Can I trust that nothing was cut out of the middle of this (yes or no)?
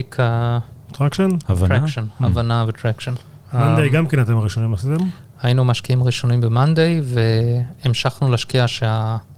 yes